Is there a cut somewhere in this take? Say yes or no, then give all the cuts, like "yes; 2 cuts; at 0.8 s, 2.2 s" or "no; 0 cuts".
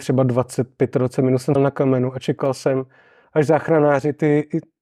yes; 1 cut; at 1.6 s